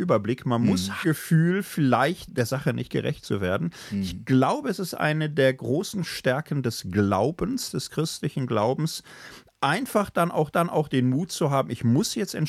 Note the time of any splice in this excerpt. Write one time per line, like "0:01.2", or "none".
0:01.0
0:02.3
0:10.5